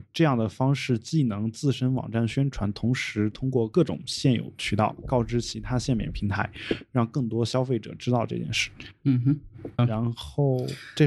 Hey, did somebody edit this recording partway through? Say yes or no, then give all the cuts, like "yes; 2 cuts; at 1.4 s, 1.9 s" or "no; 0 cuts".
yes; 1 cut; at 9.8 s